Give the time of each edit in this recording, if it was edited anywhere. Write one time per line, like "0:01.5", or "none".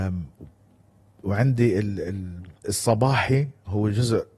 0:02.6